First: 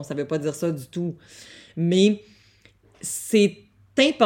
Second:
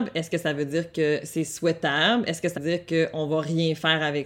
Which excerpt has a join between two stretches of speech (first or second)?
second